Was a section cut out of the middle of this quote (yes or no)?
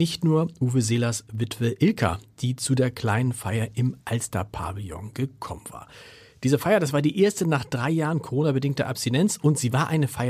no